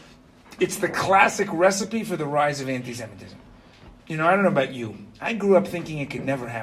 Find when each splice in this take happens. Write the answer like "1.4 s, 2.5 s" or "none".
4.0 s